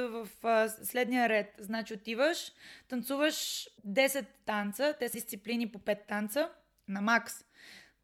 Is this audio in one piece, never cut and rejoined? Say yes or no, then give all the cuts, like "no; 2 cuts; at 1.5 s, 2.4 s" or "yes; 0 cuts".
no; 3 cuts; at 3.8 s, 5.1 s, 6.9 s